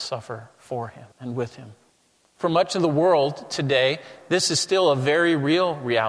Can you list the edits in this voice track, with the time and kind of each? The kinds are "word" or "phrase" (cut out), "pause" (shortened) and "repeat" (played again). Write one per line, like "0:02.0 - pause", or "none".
0:01.1 - pause
0:01.9 - pause